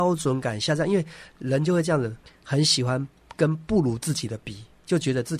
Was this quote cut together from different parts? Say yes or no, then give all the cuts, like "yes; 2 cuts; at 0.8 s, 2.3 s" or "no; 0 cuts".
yes; 1 cut; at 2.2 s